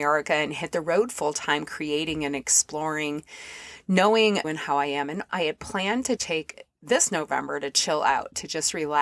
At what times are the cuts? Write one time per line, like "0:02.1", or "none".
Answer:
0:04.4
0:05.3
0:06.2